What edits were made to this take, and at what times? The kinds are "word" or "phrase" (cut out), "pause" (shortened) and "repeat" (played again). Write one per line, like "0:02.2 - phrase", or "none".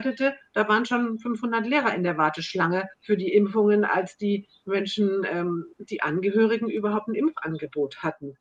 0:02.9 - pause
0:05.7 - pause